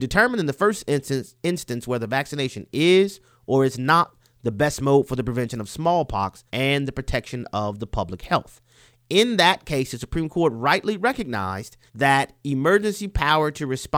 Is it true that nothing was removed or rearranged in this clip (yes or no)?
no